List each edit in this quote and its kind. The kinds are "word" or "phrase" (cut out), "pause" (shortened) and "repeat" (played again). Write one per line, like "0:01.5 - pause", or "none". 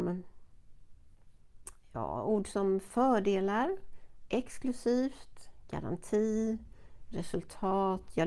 none